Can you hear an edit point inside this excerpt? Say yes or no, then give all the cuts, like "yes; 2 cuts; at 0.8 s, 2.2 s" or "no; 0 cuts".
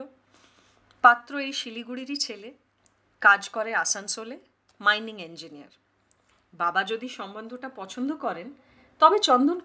no; 0 cuts